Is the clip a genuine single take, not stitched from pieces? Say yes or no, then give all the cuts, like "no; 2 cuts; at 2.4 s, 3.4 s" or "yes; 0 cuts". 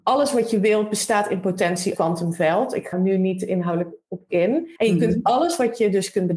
no; 3 cuts; at 1.9 s, 2.9 s, 4.8 s